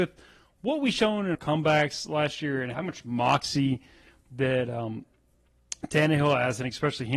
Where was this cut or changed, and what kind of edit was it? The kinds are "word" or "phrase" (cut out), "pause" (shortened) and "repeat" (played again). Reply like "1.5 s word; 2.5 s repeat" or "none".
1.3 s word; 2.7 s word